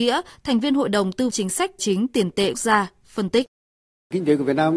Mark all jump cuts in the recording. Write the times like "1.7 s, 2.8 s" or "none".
1.3 s, 1.8 s, 2.5 s